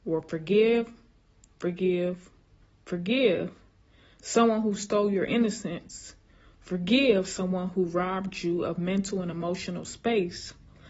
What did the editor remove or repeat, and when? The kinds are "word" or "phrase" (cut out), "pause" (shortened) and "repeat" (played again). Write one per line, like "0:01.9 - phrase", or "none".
none